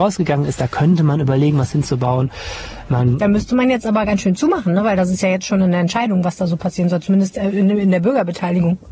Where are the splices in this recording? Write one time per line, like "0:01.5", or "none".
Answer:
none